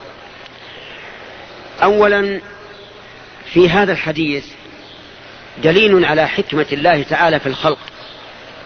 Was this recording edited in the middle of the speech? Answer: no; 0 cuts

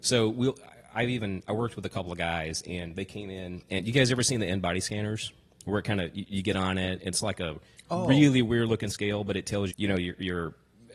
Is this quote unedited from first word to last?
no; 1 cut; at 9.7 s

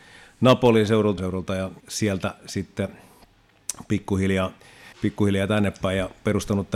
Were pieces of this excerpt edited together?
yes; 3 cuts; at 1.2 s, 1.8 s, 4.9 s

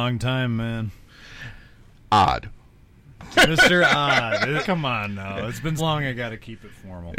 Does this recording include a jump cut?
yes; 3 cuts; at 3.3 s, 4.6 s, 5.8 s

